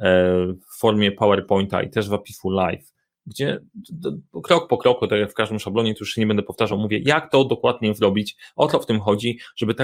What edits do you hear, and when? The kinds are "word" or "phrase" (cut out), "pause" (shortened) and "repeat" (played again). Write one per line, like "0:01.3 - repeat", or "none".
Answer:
none